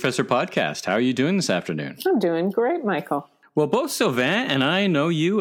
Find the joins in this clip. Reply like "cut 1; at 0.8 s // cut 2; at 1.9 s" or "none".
none